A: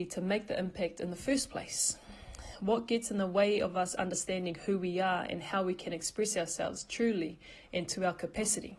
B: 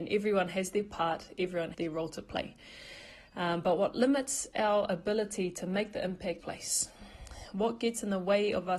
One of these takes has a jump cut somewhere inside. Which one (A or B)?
B